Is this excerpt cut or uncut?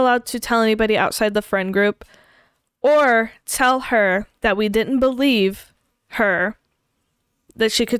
uncut